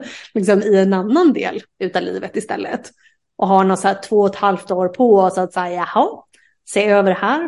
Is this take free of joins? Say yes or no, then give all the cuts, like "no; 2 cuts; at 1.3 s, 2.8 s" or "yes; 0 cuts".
yes; 0 cuts